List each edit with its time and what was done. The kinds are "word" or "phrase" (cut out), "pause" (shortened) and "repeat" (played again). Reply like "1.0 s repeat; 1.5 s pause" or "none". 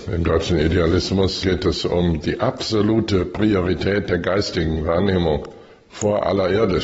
1.4 s word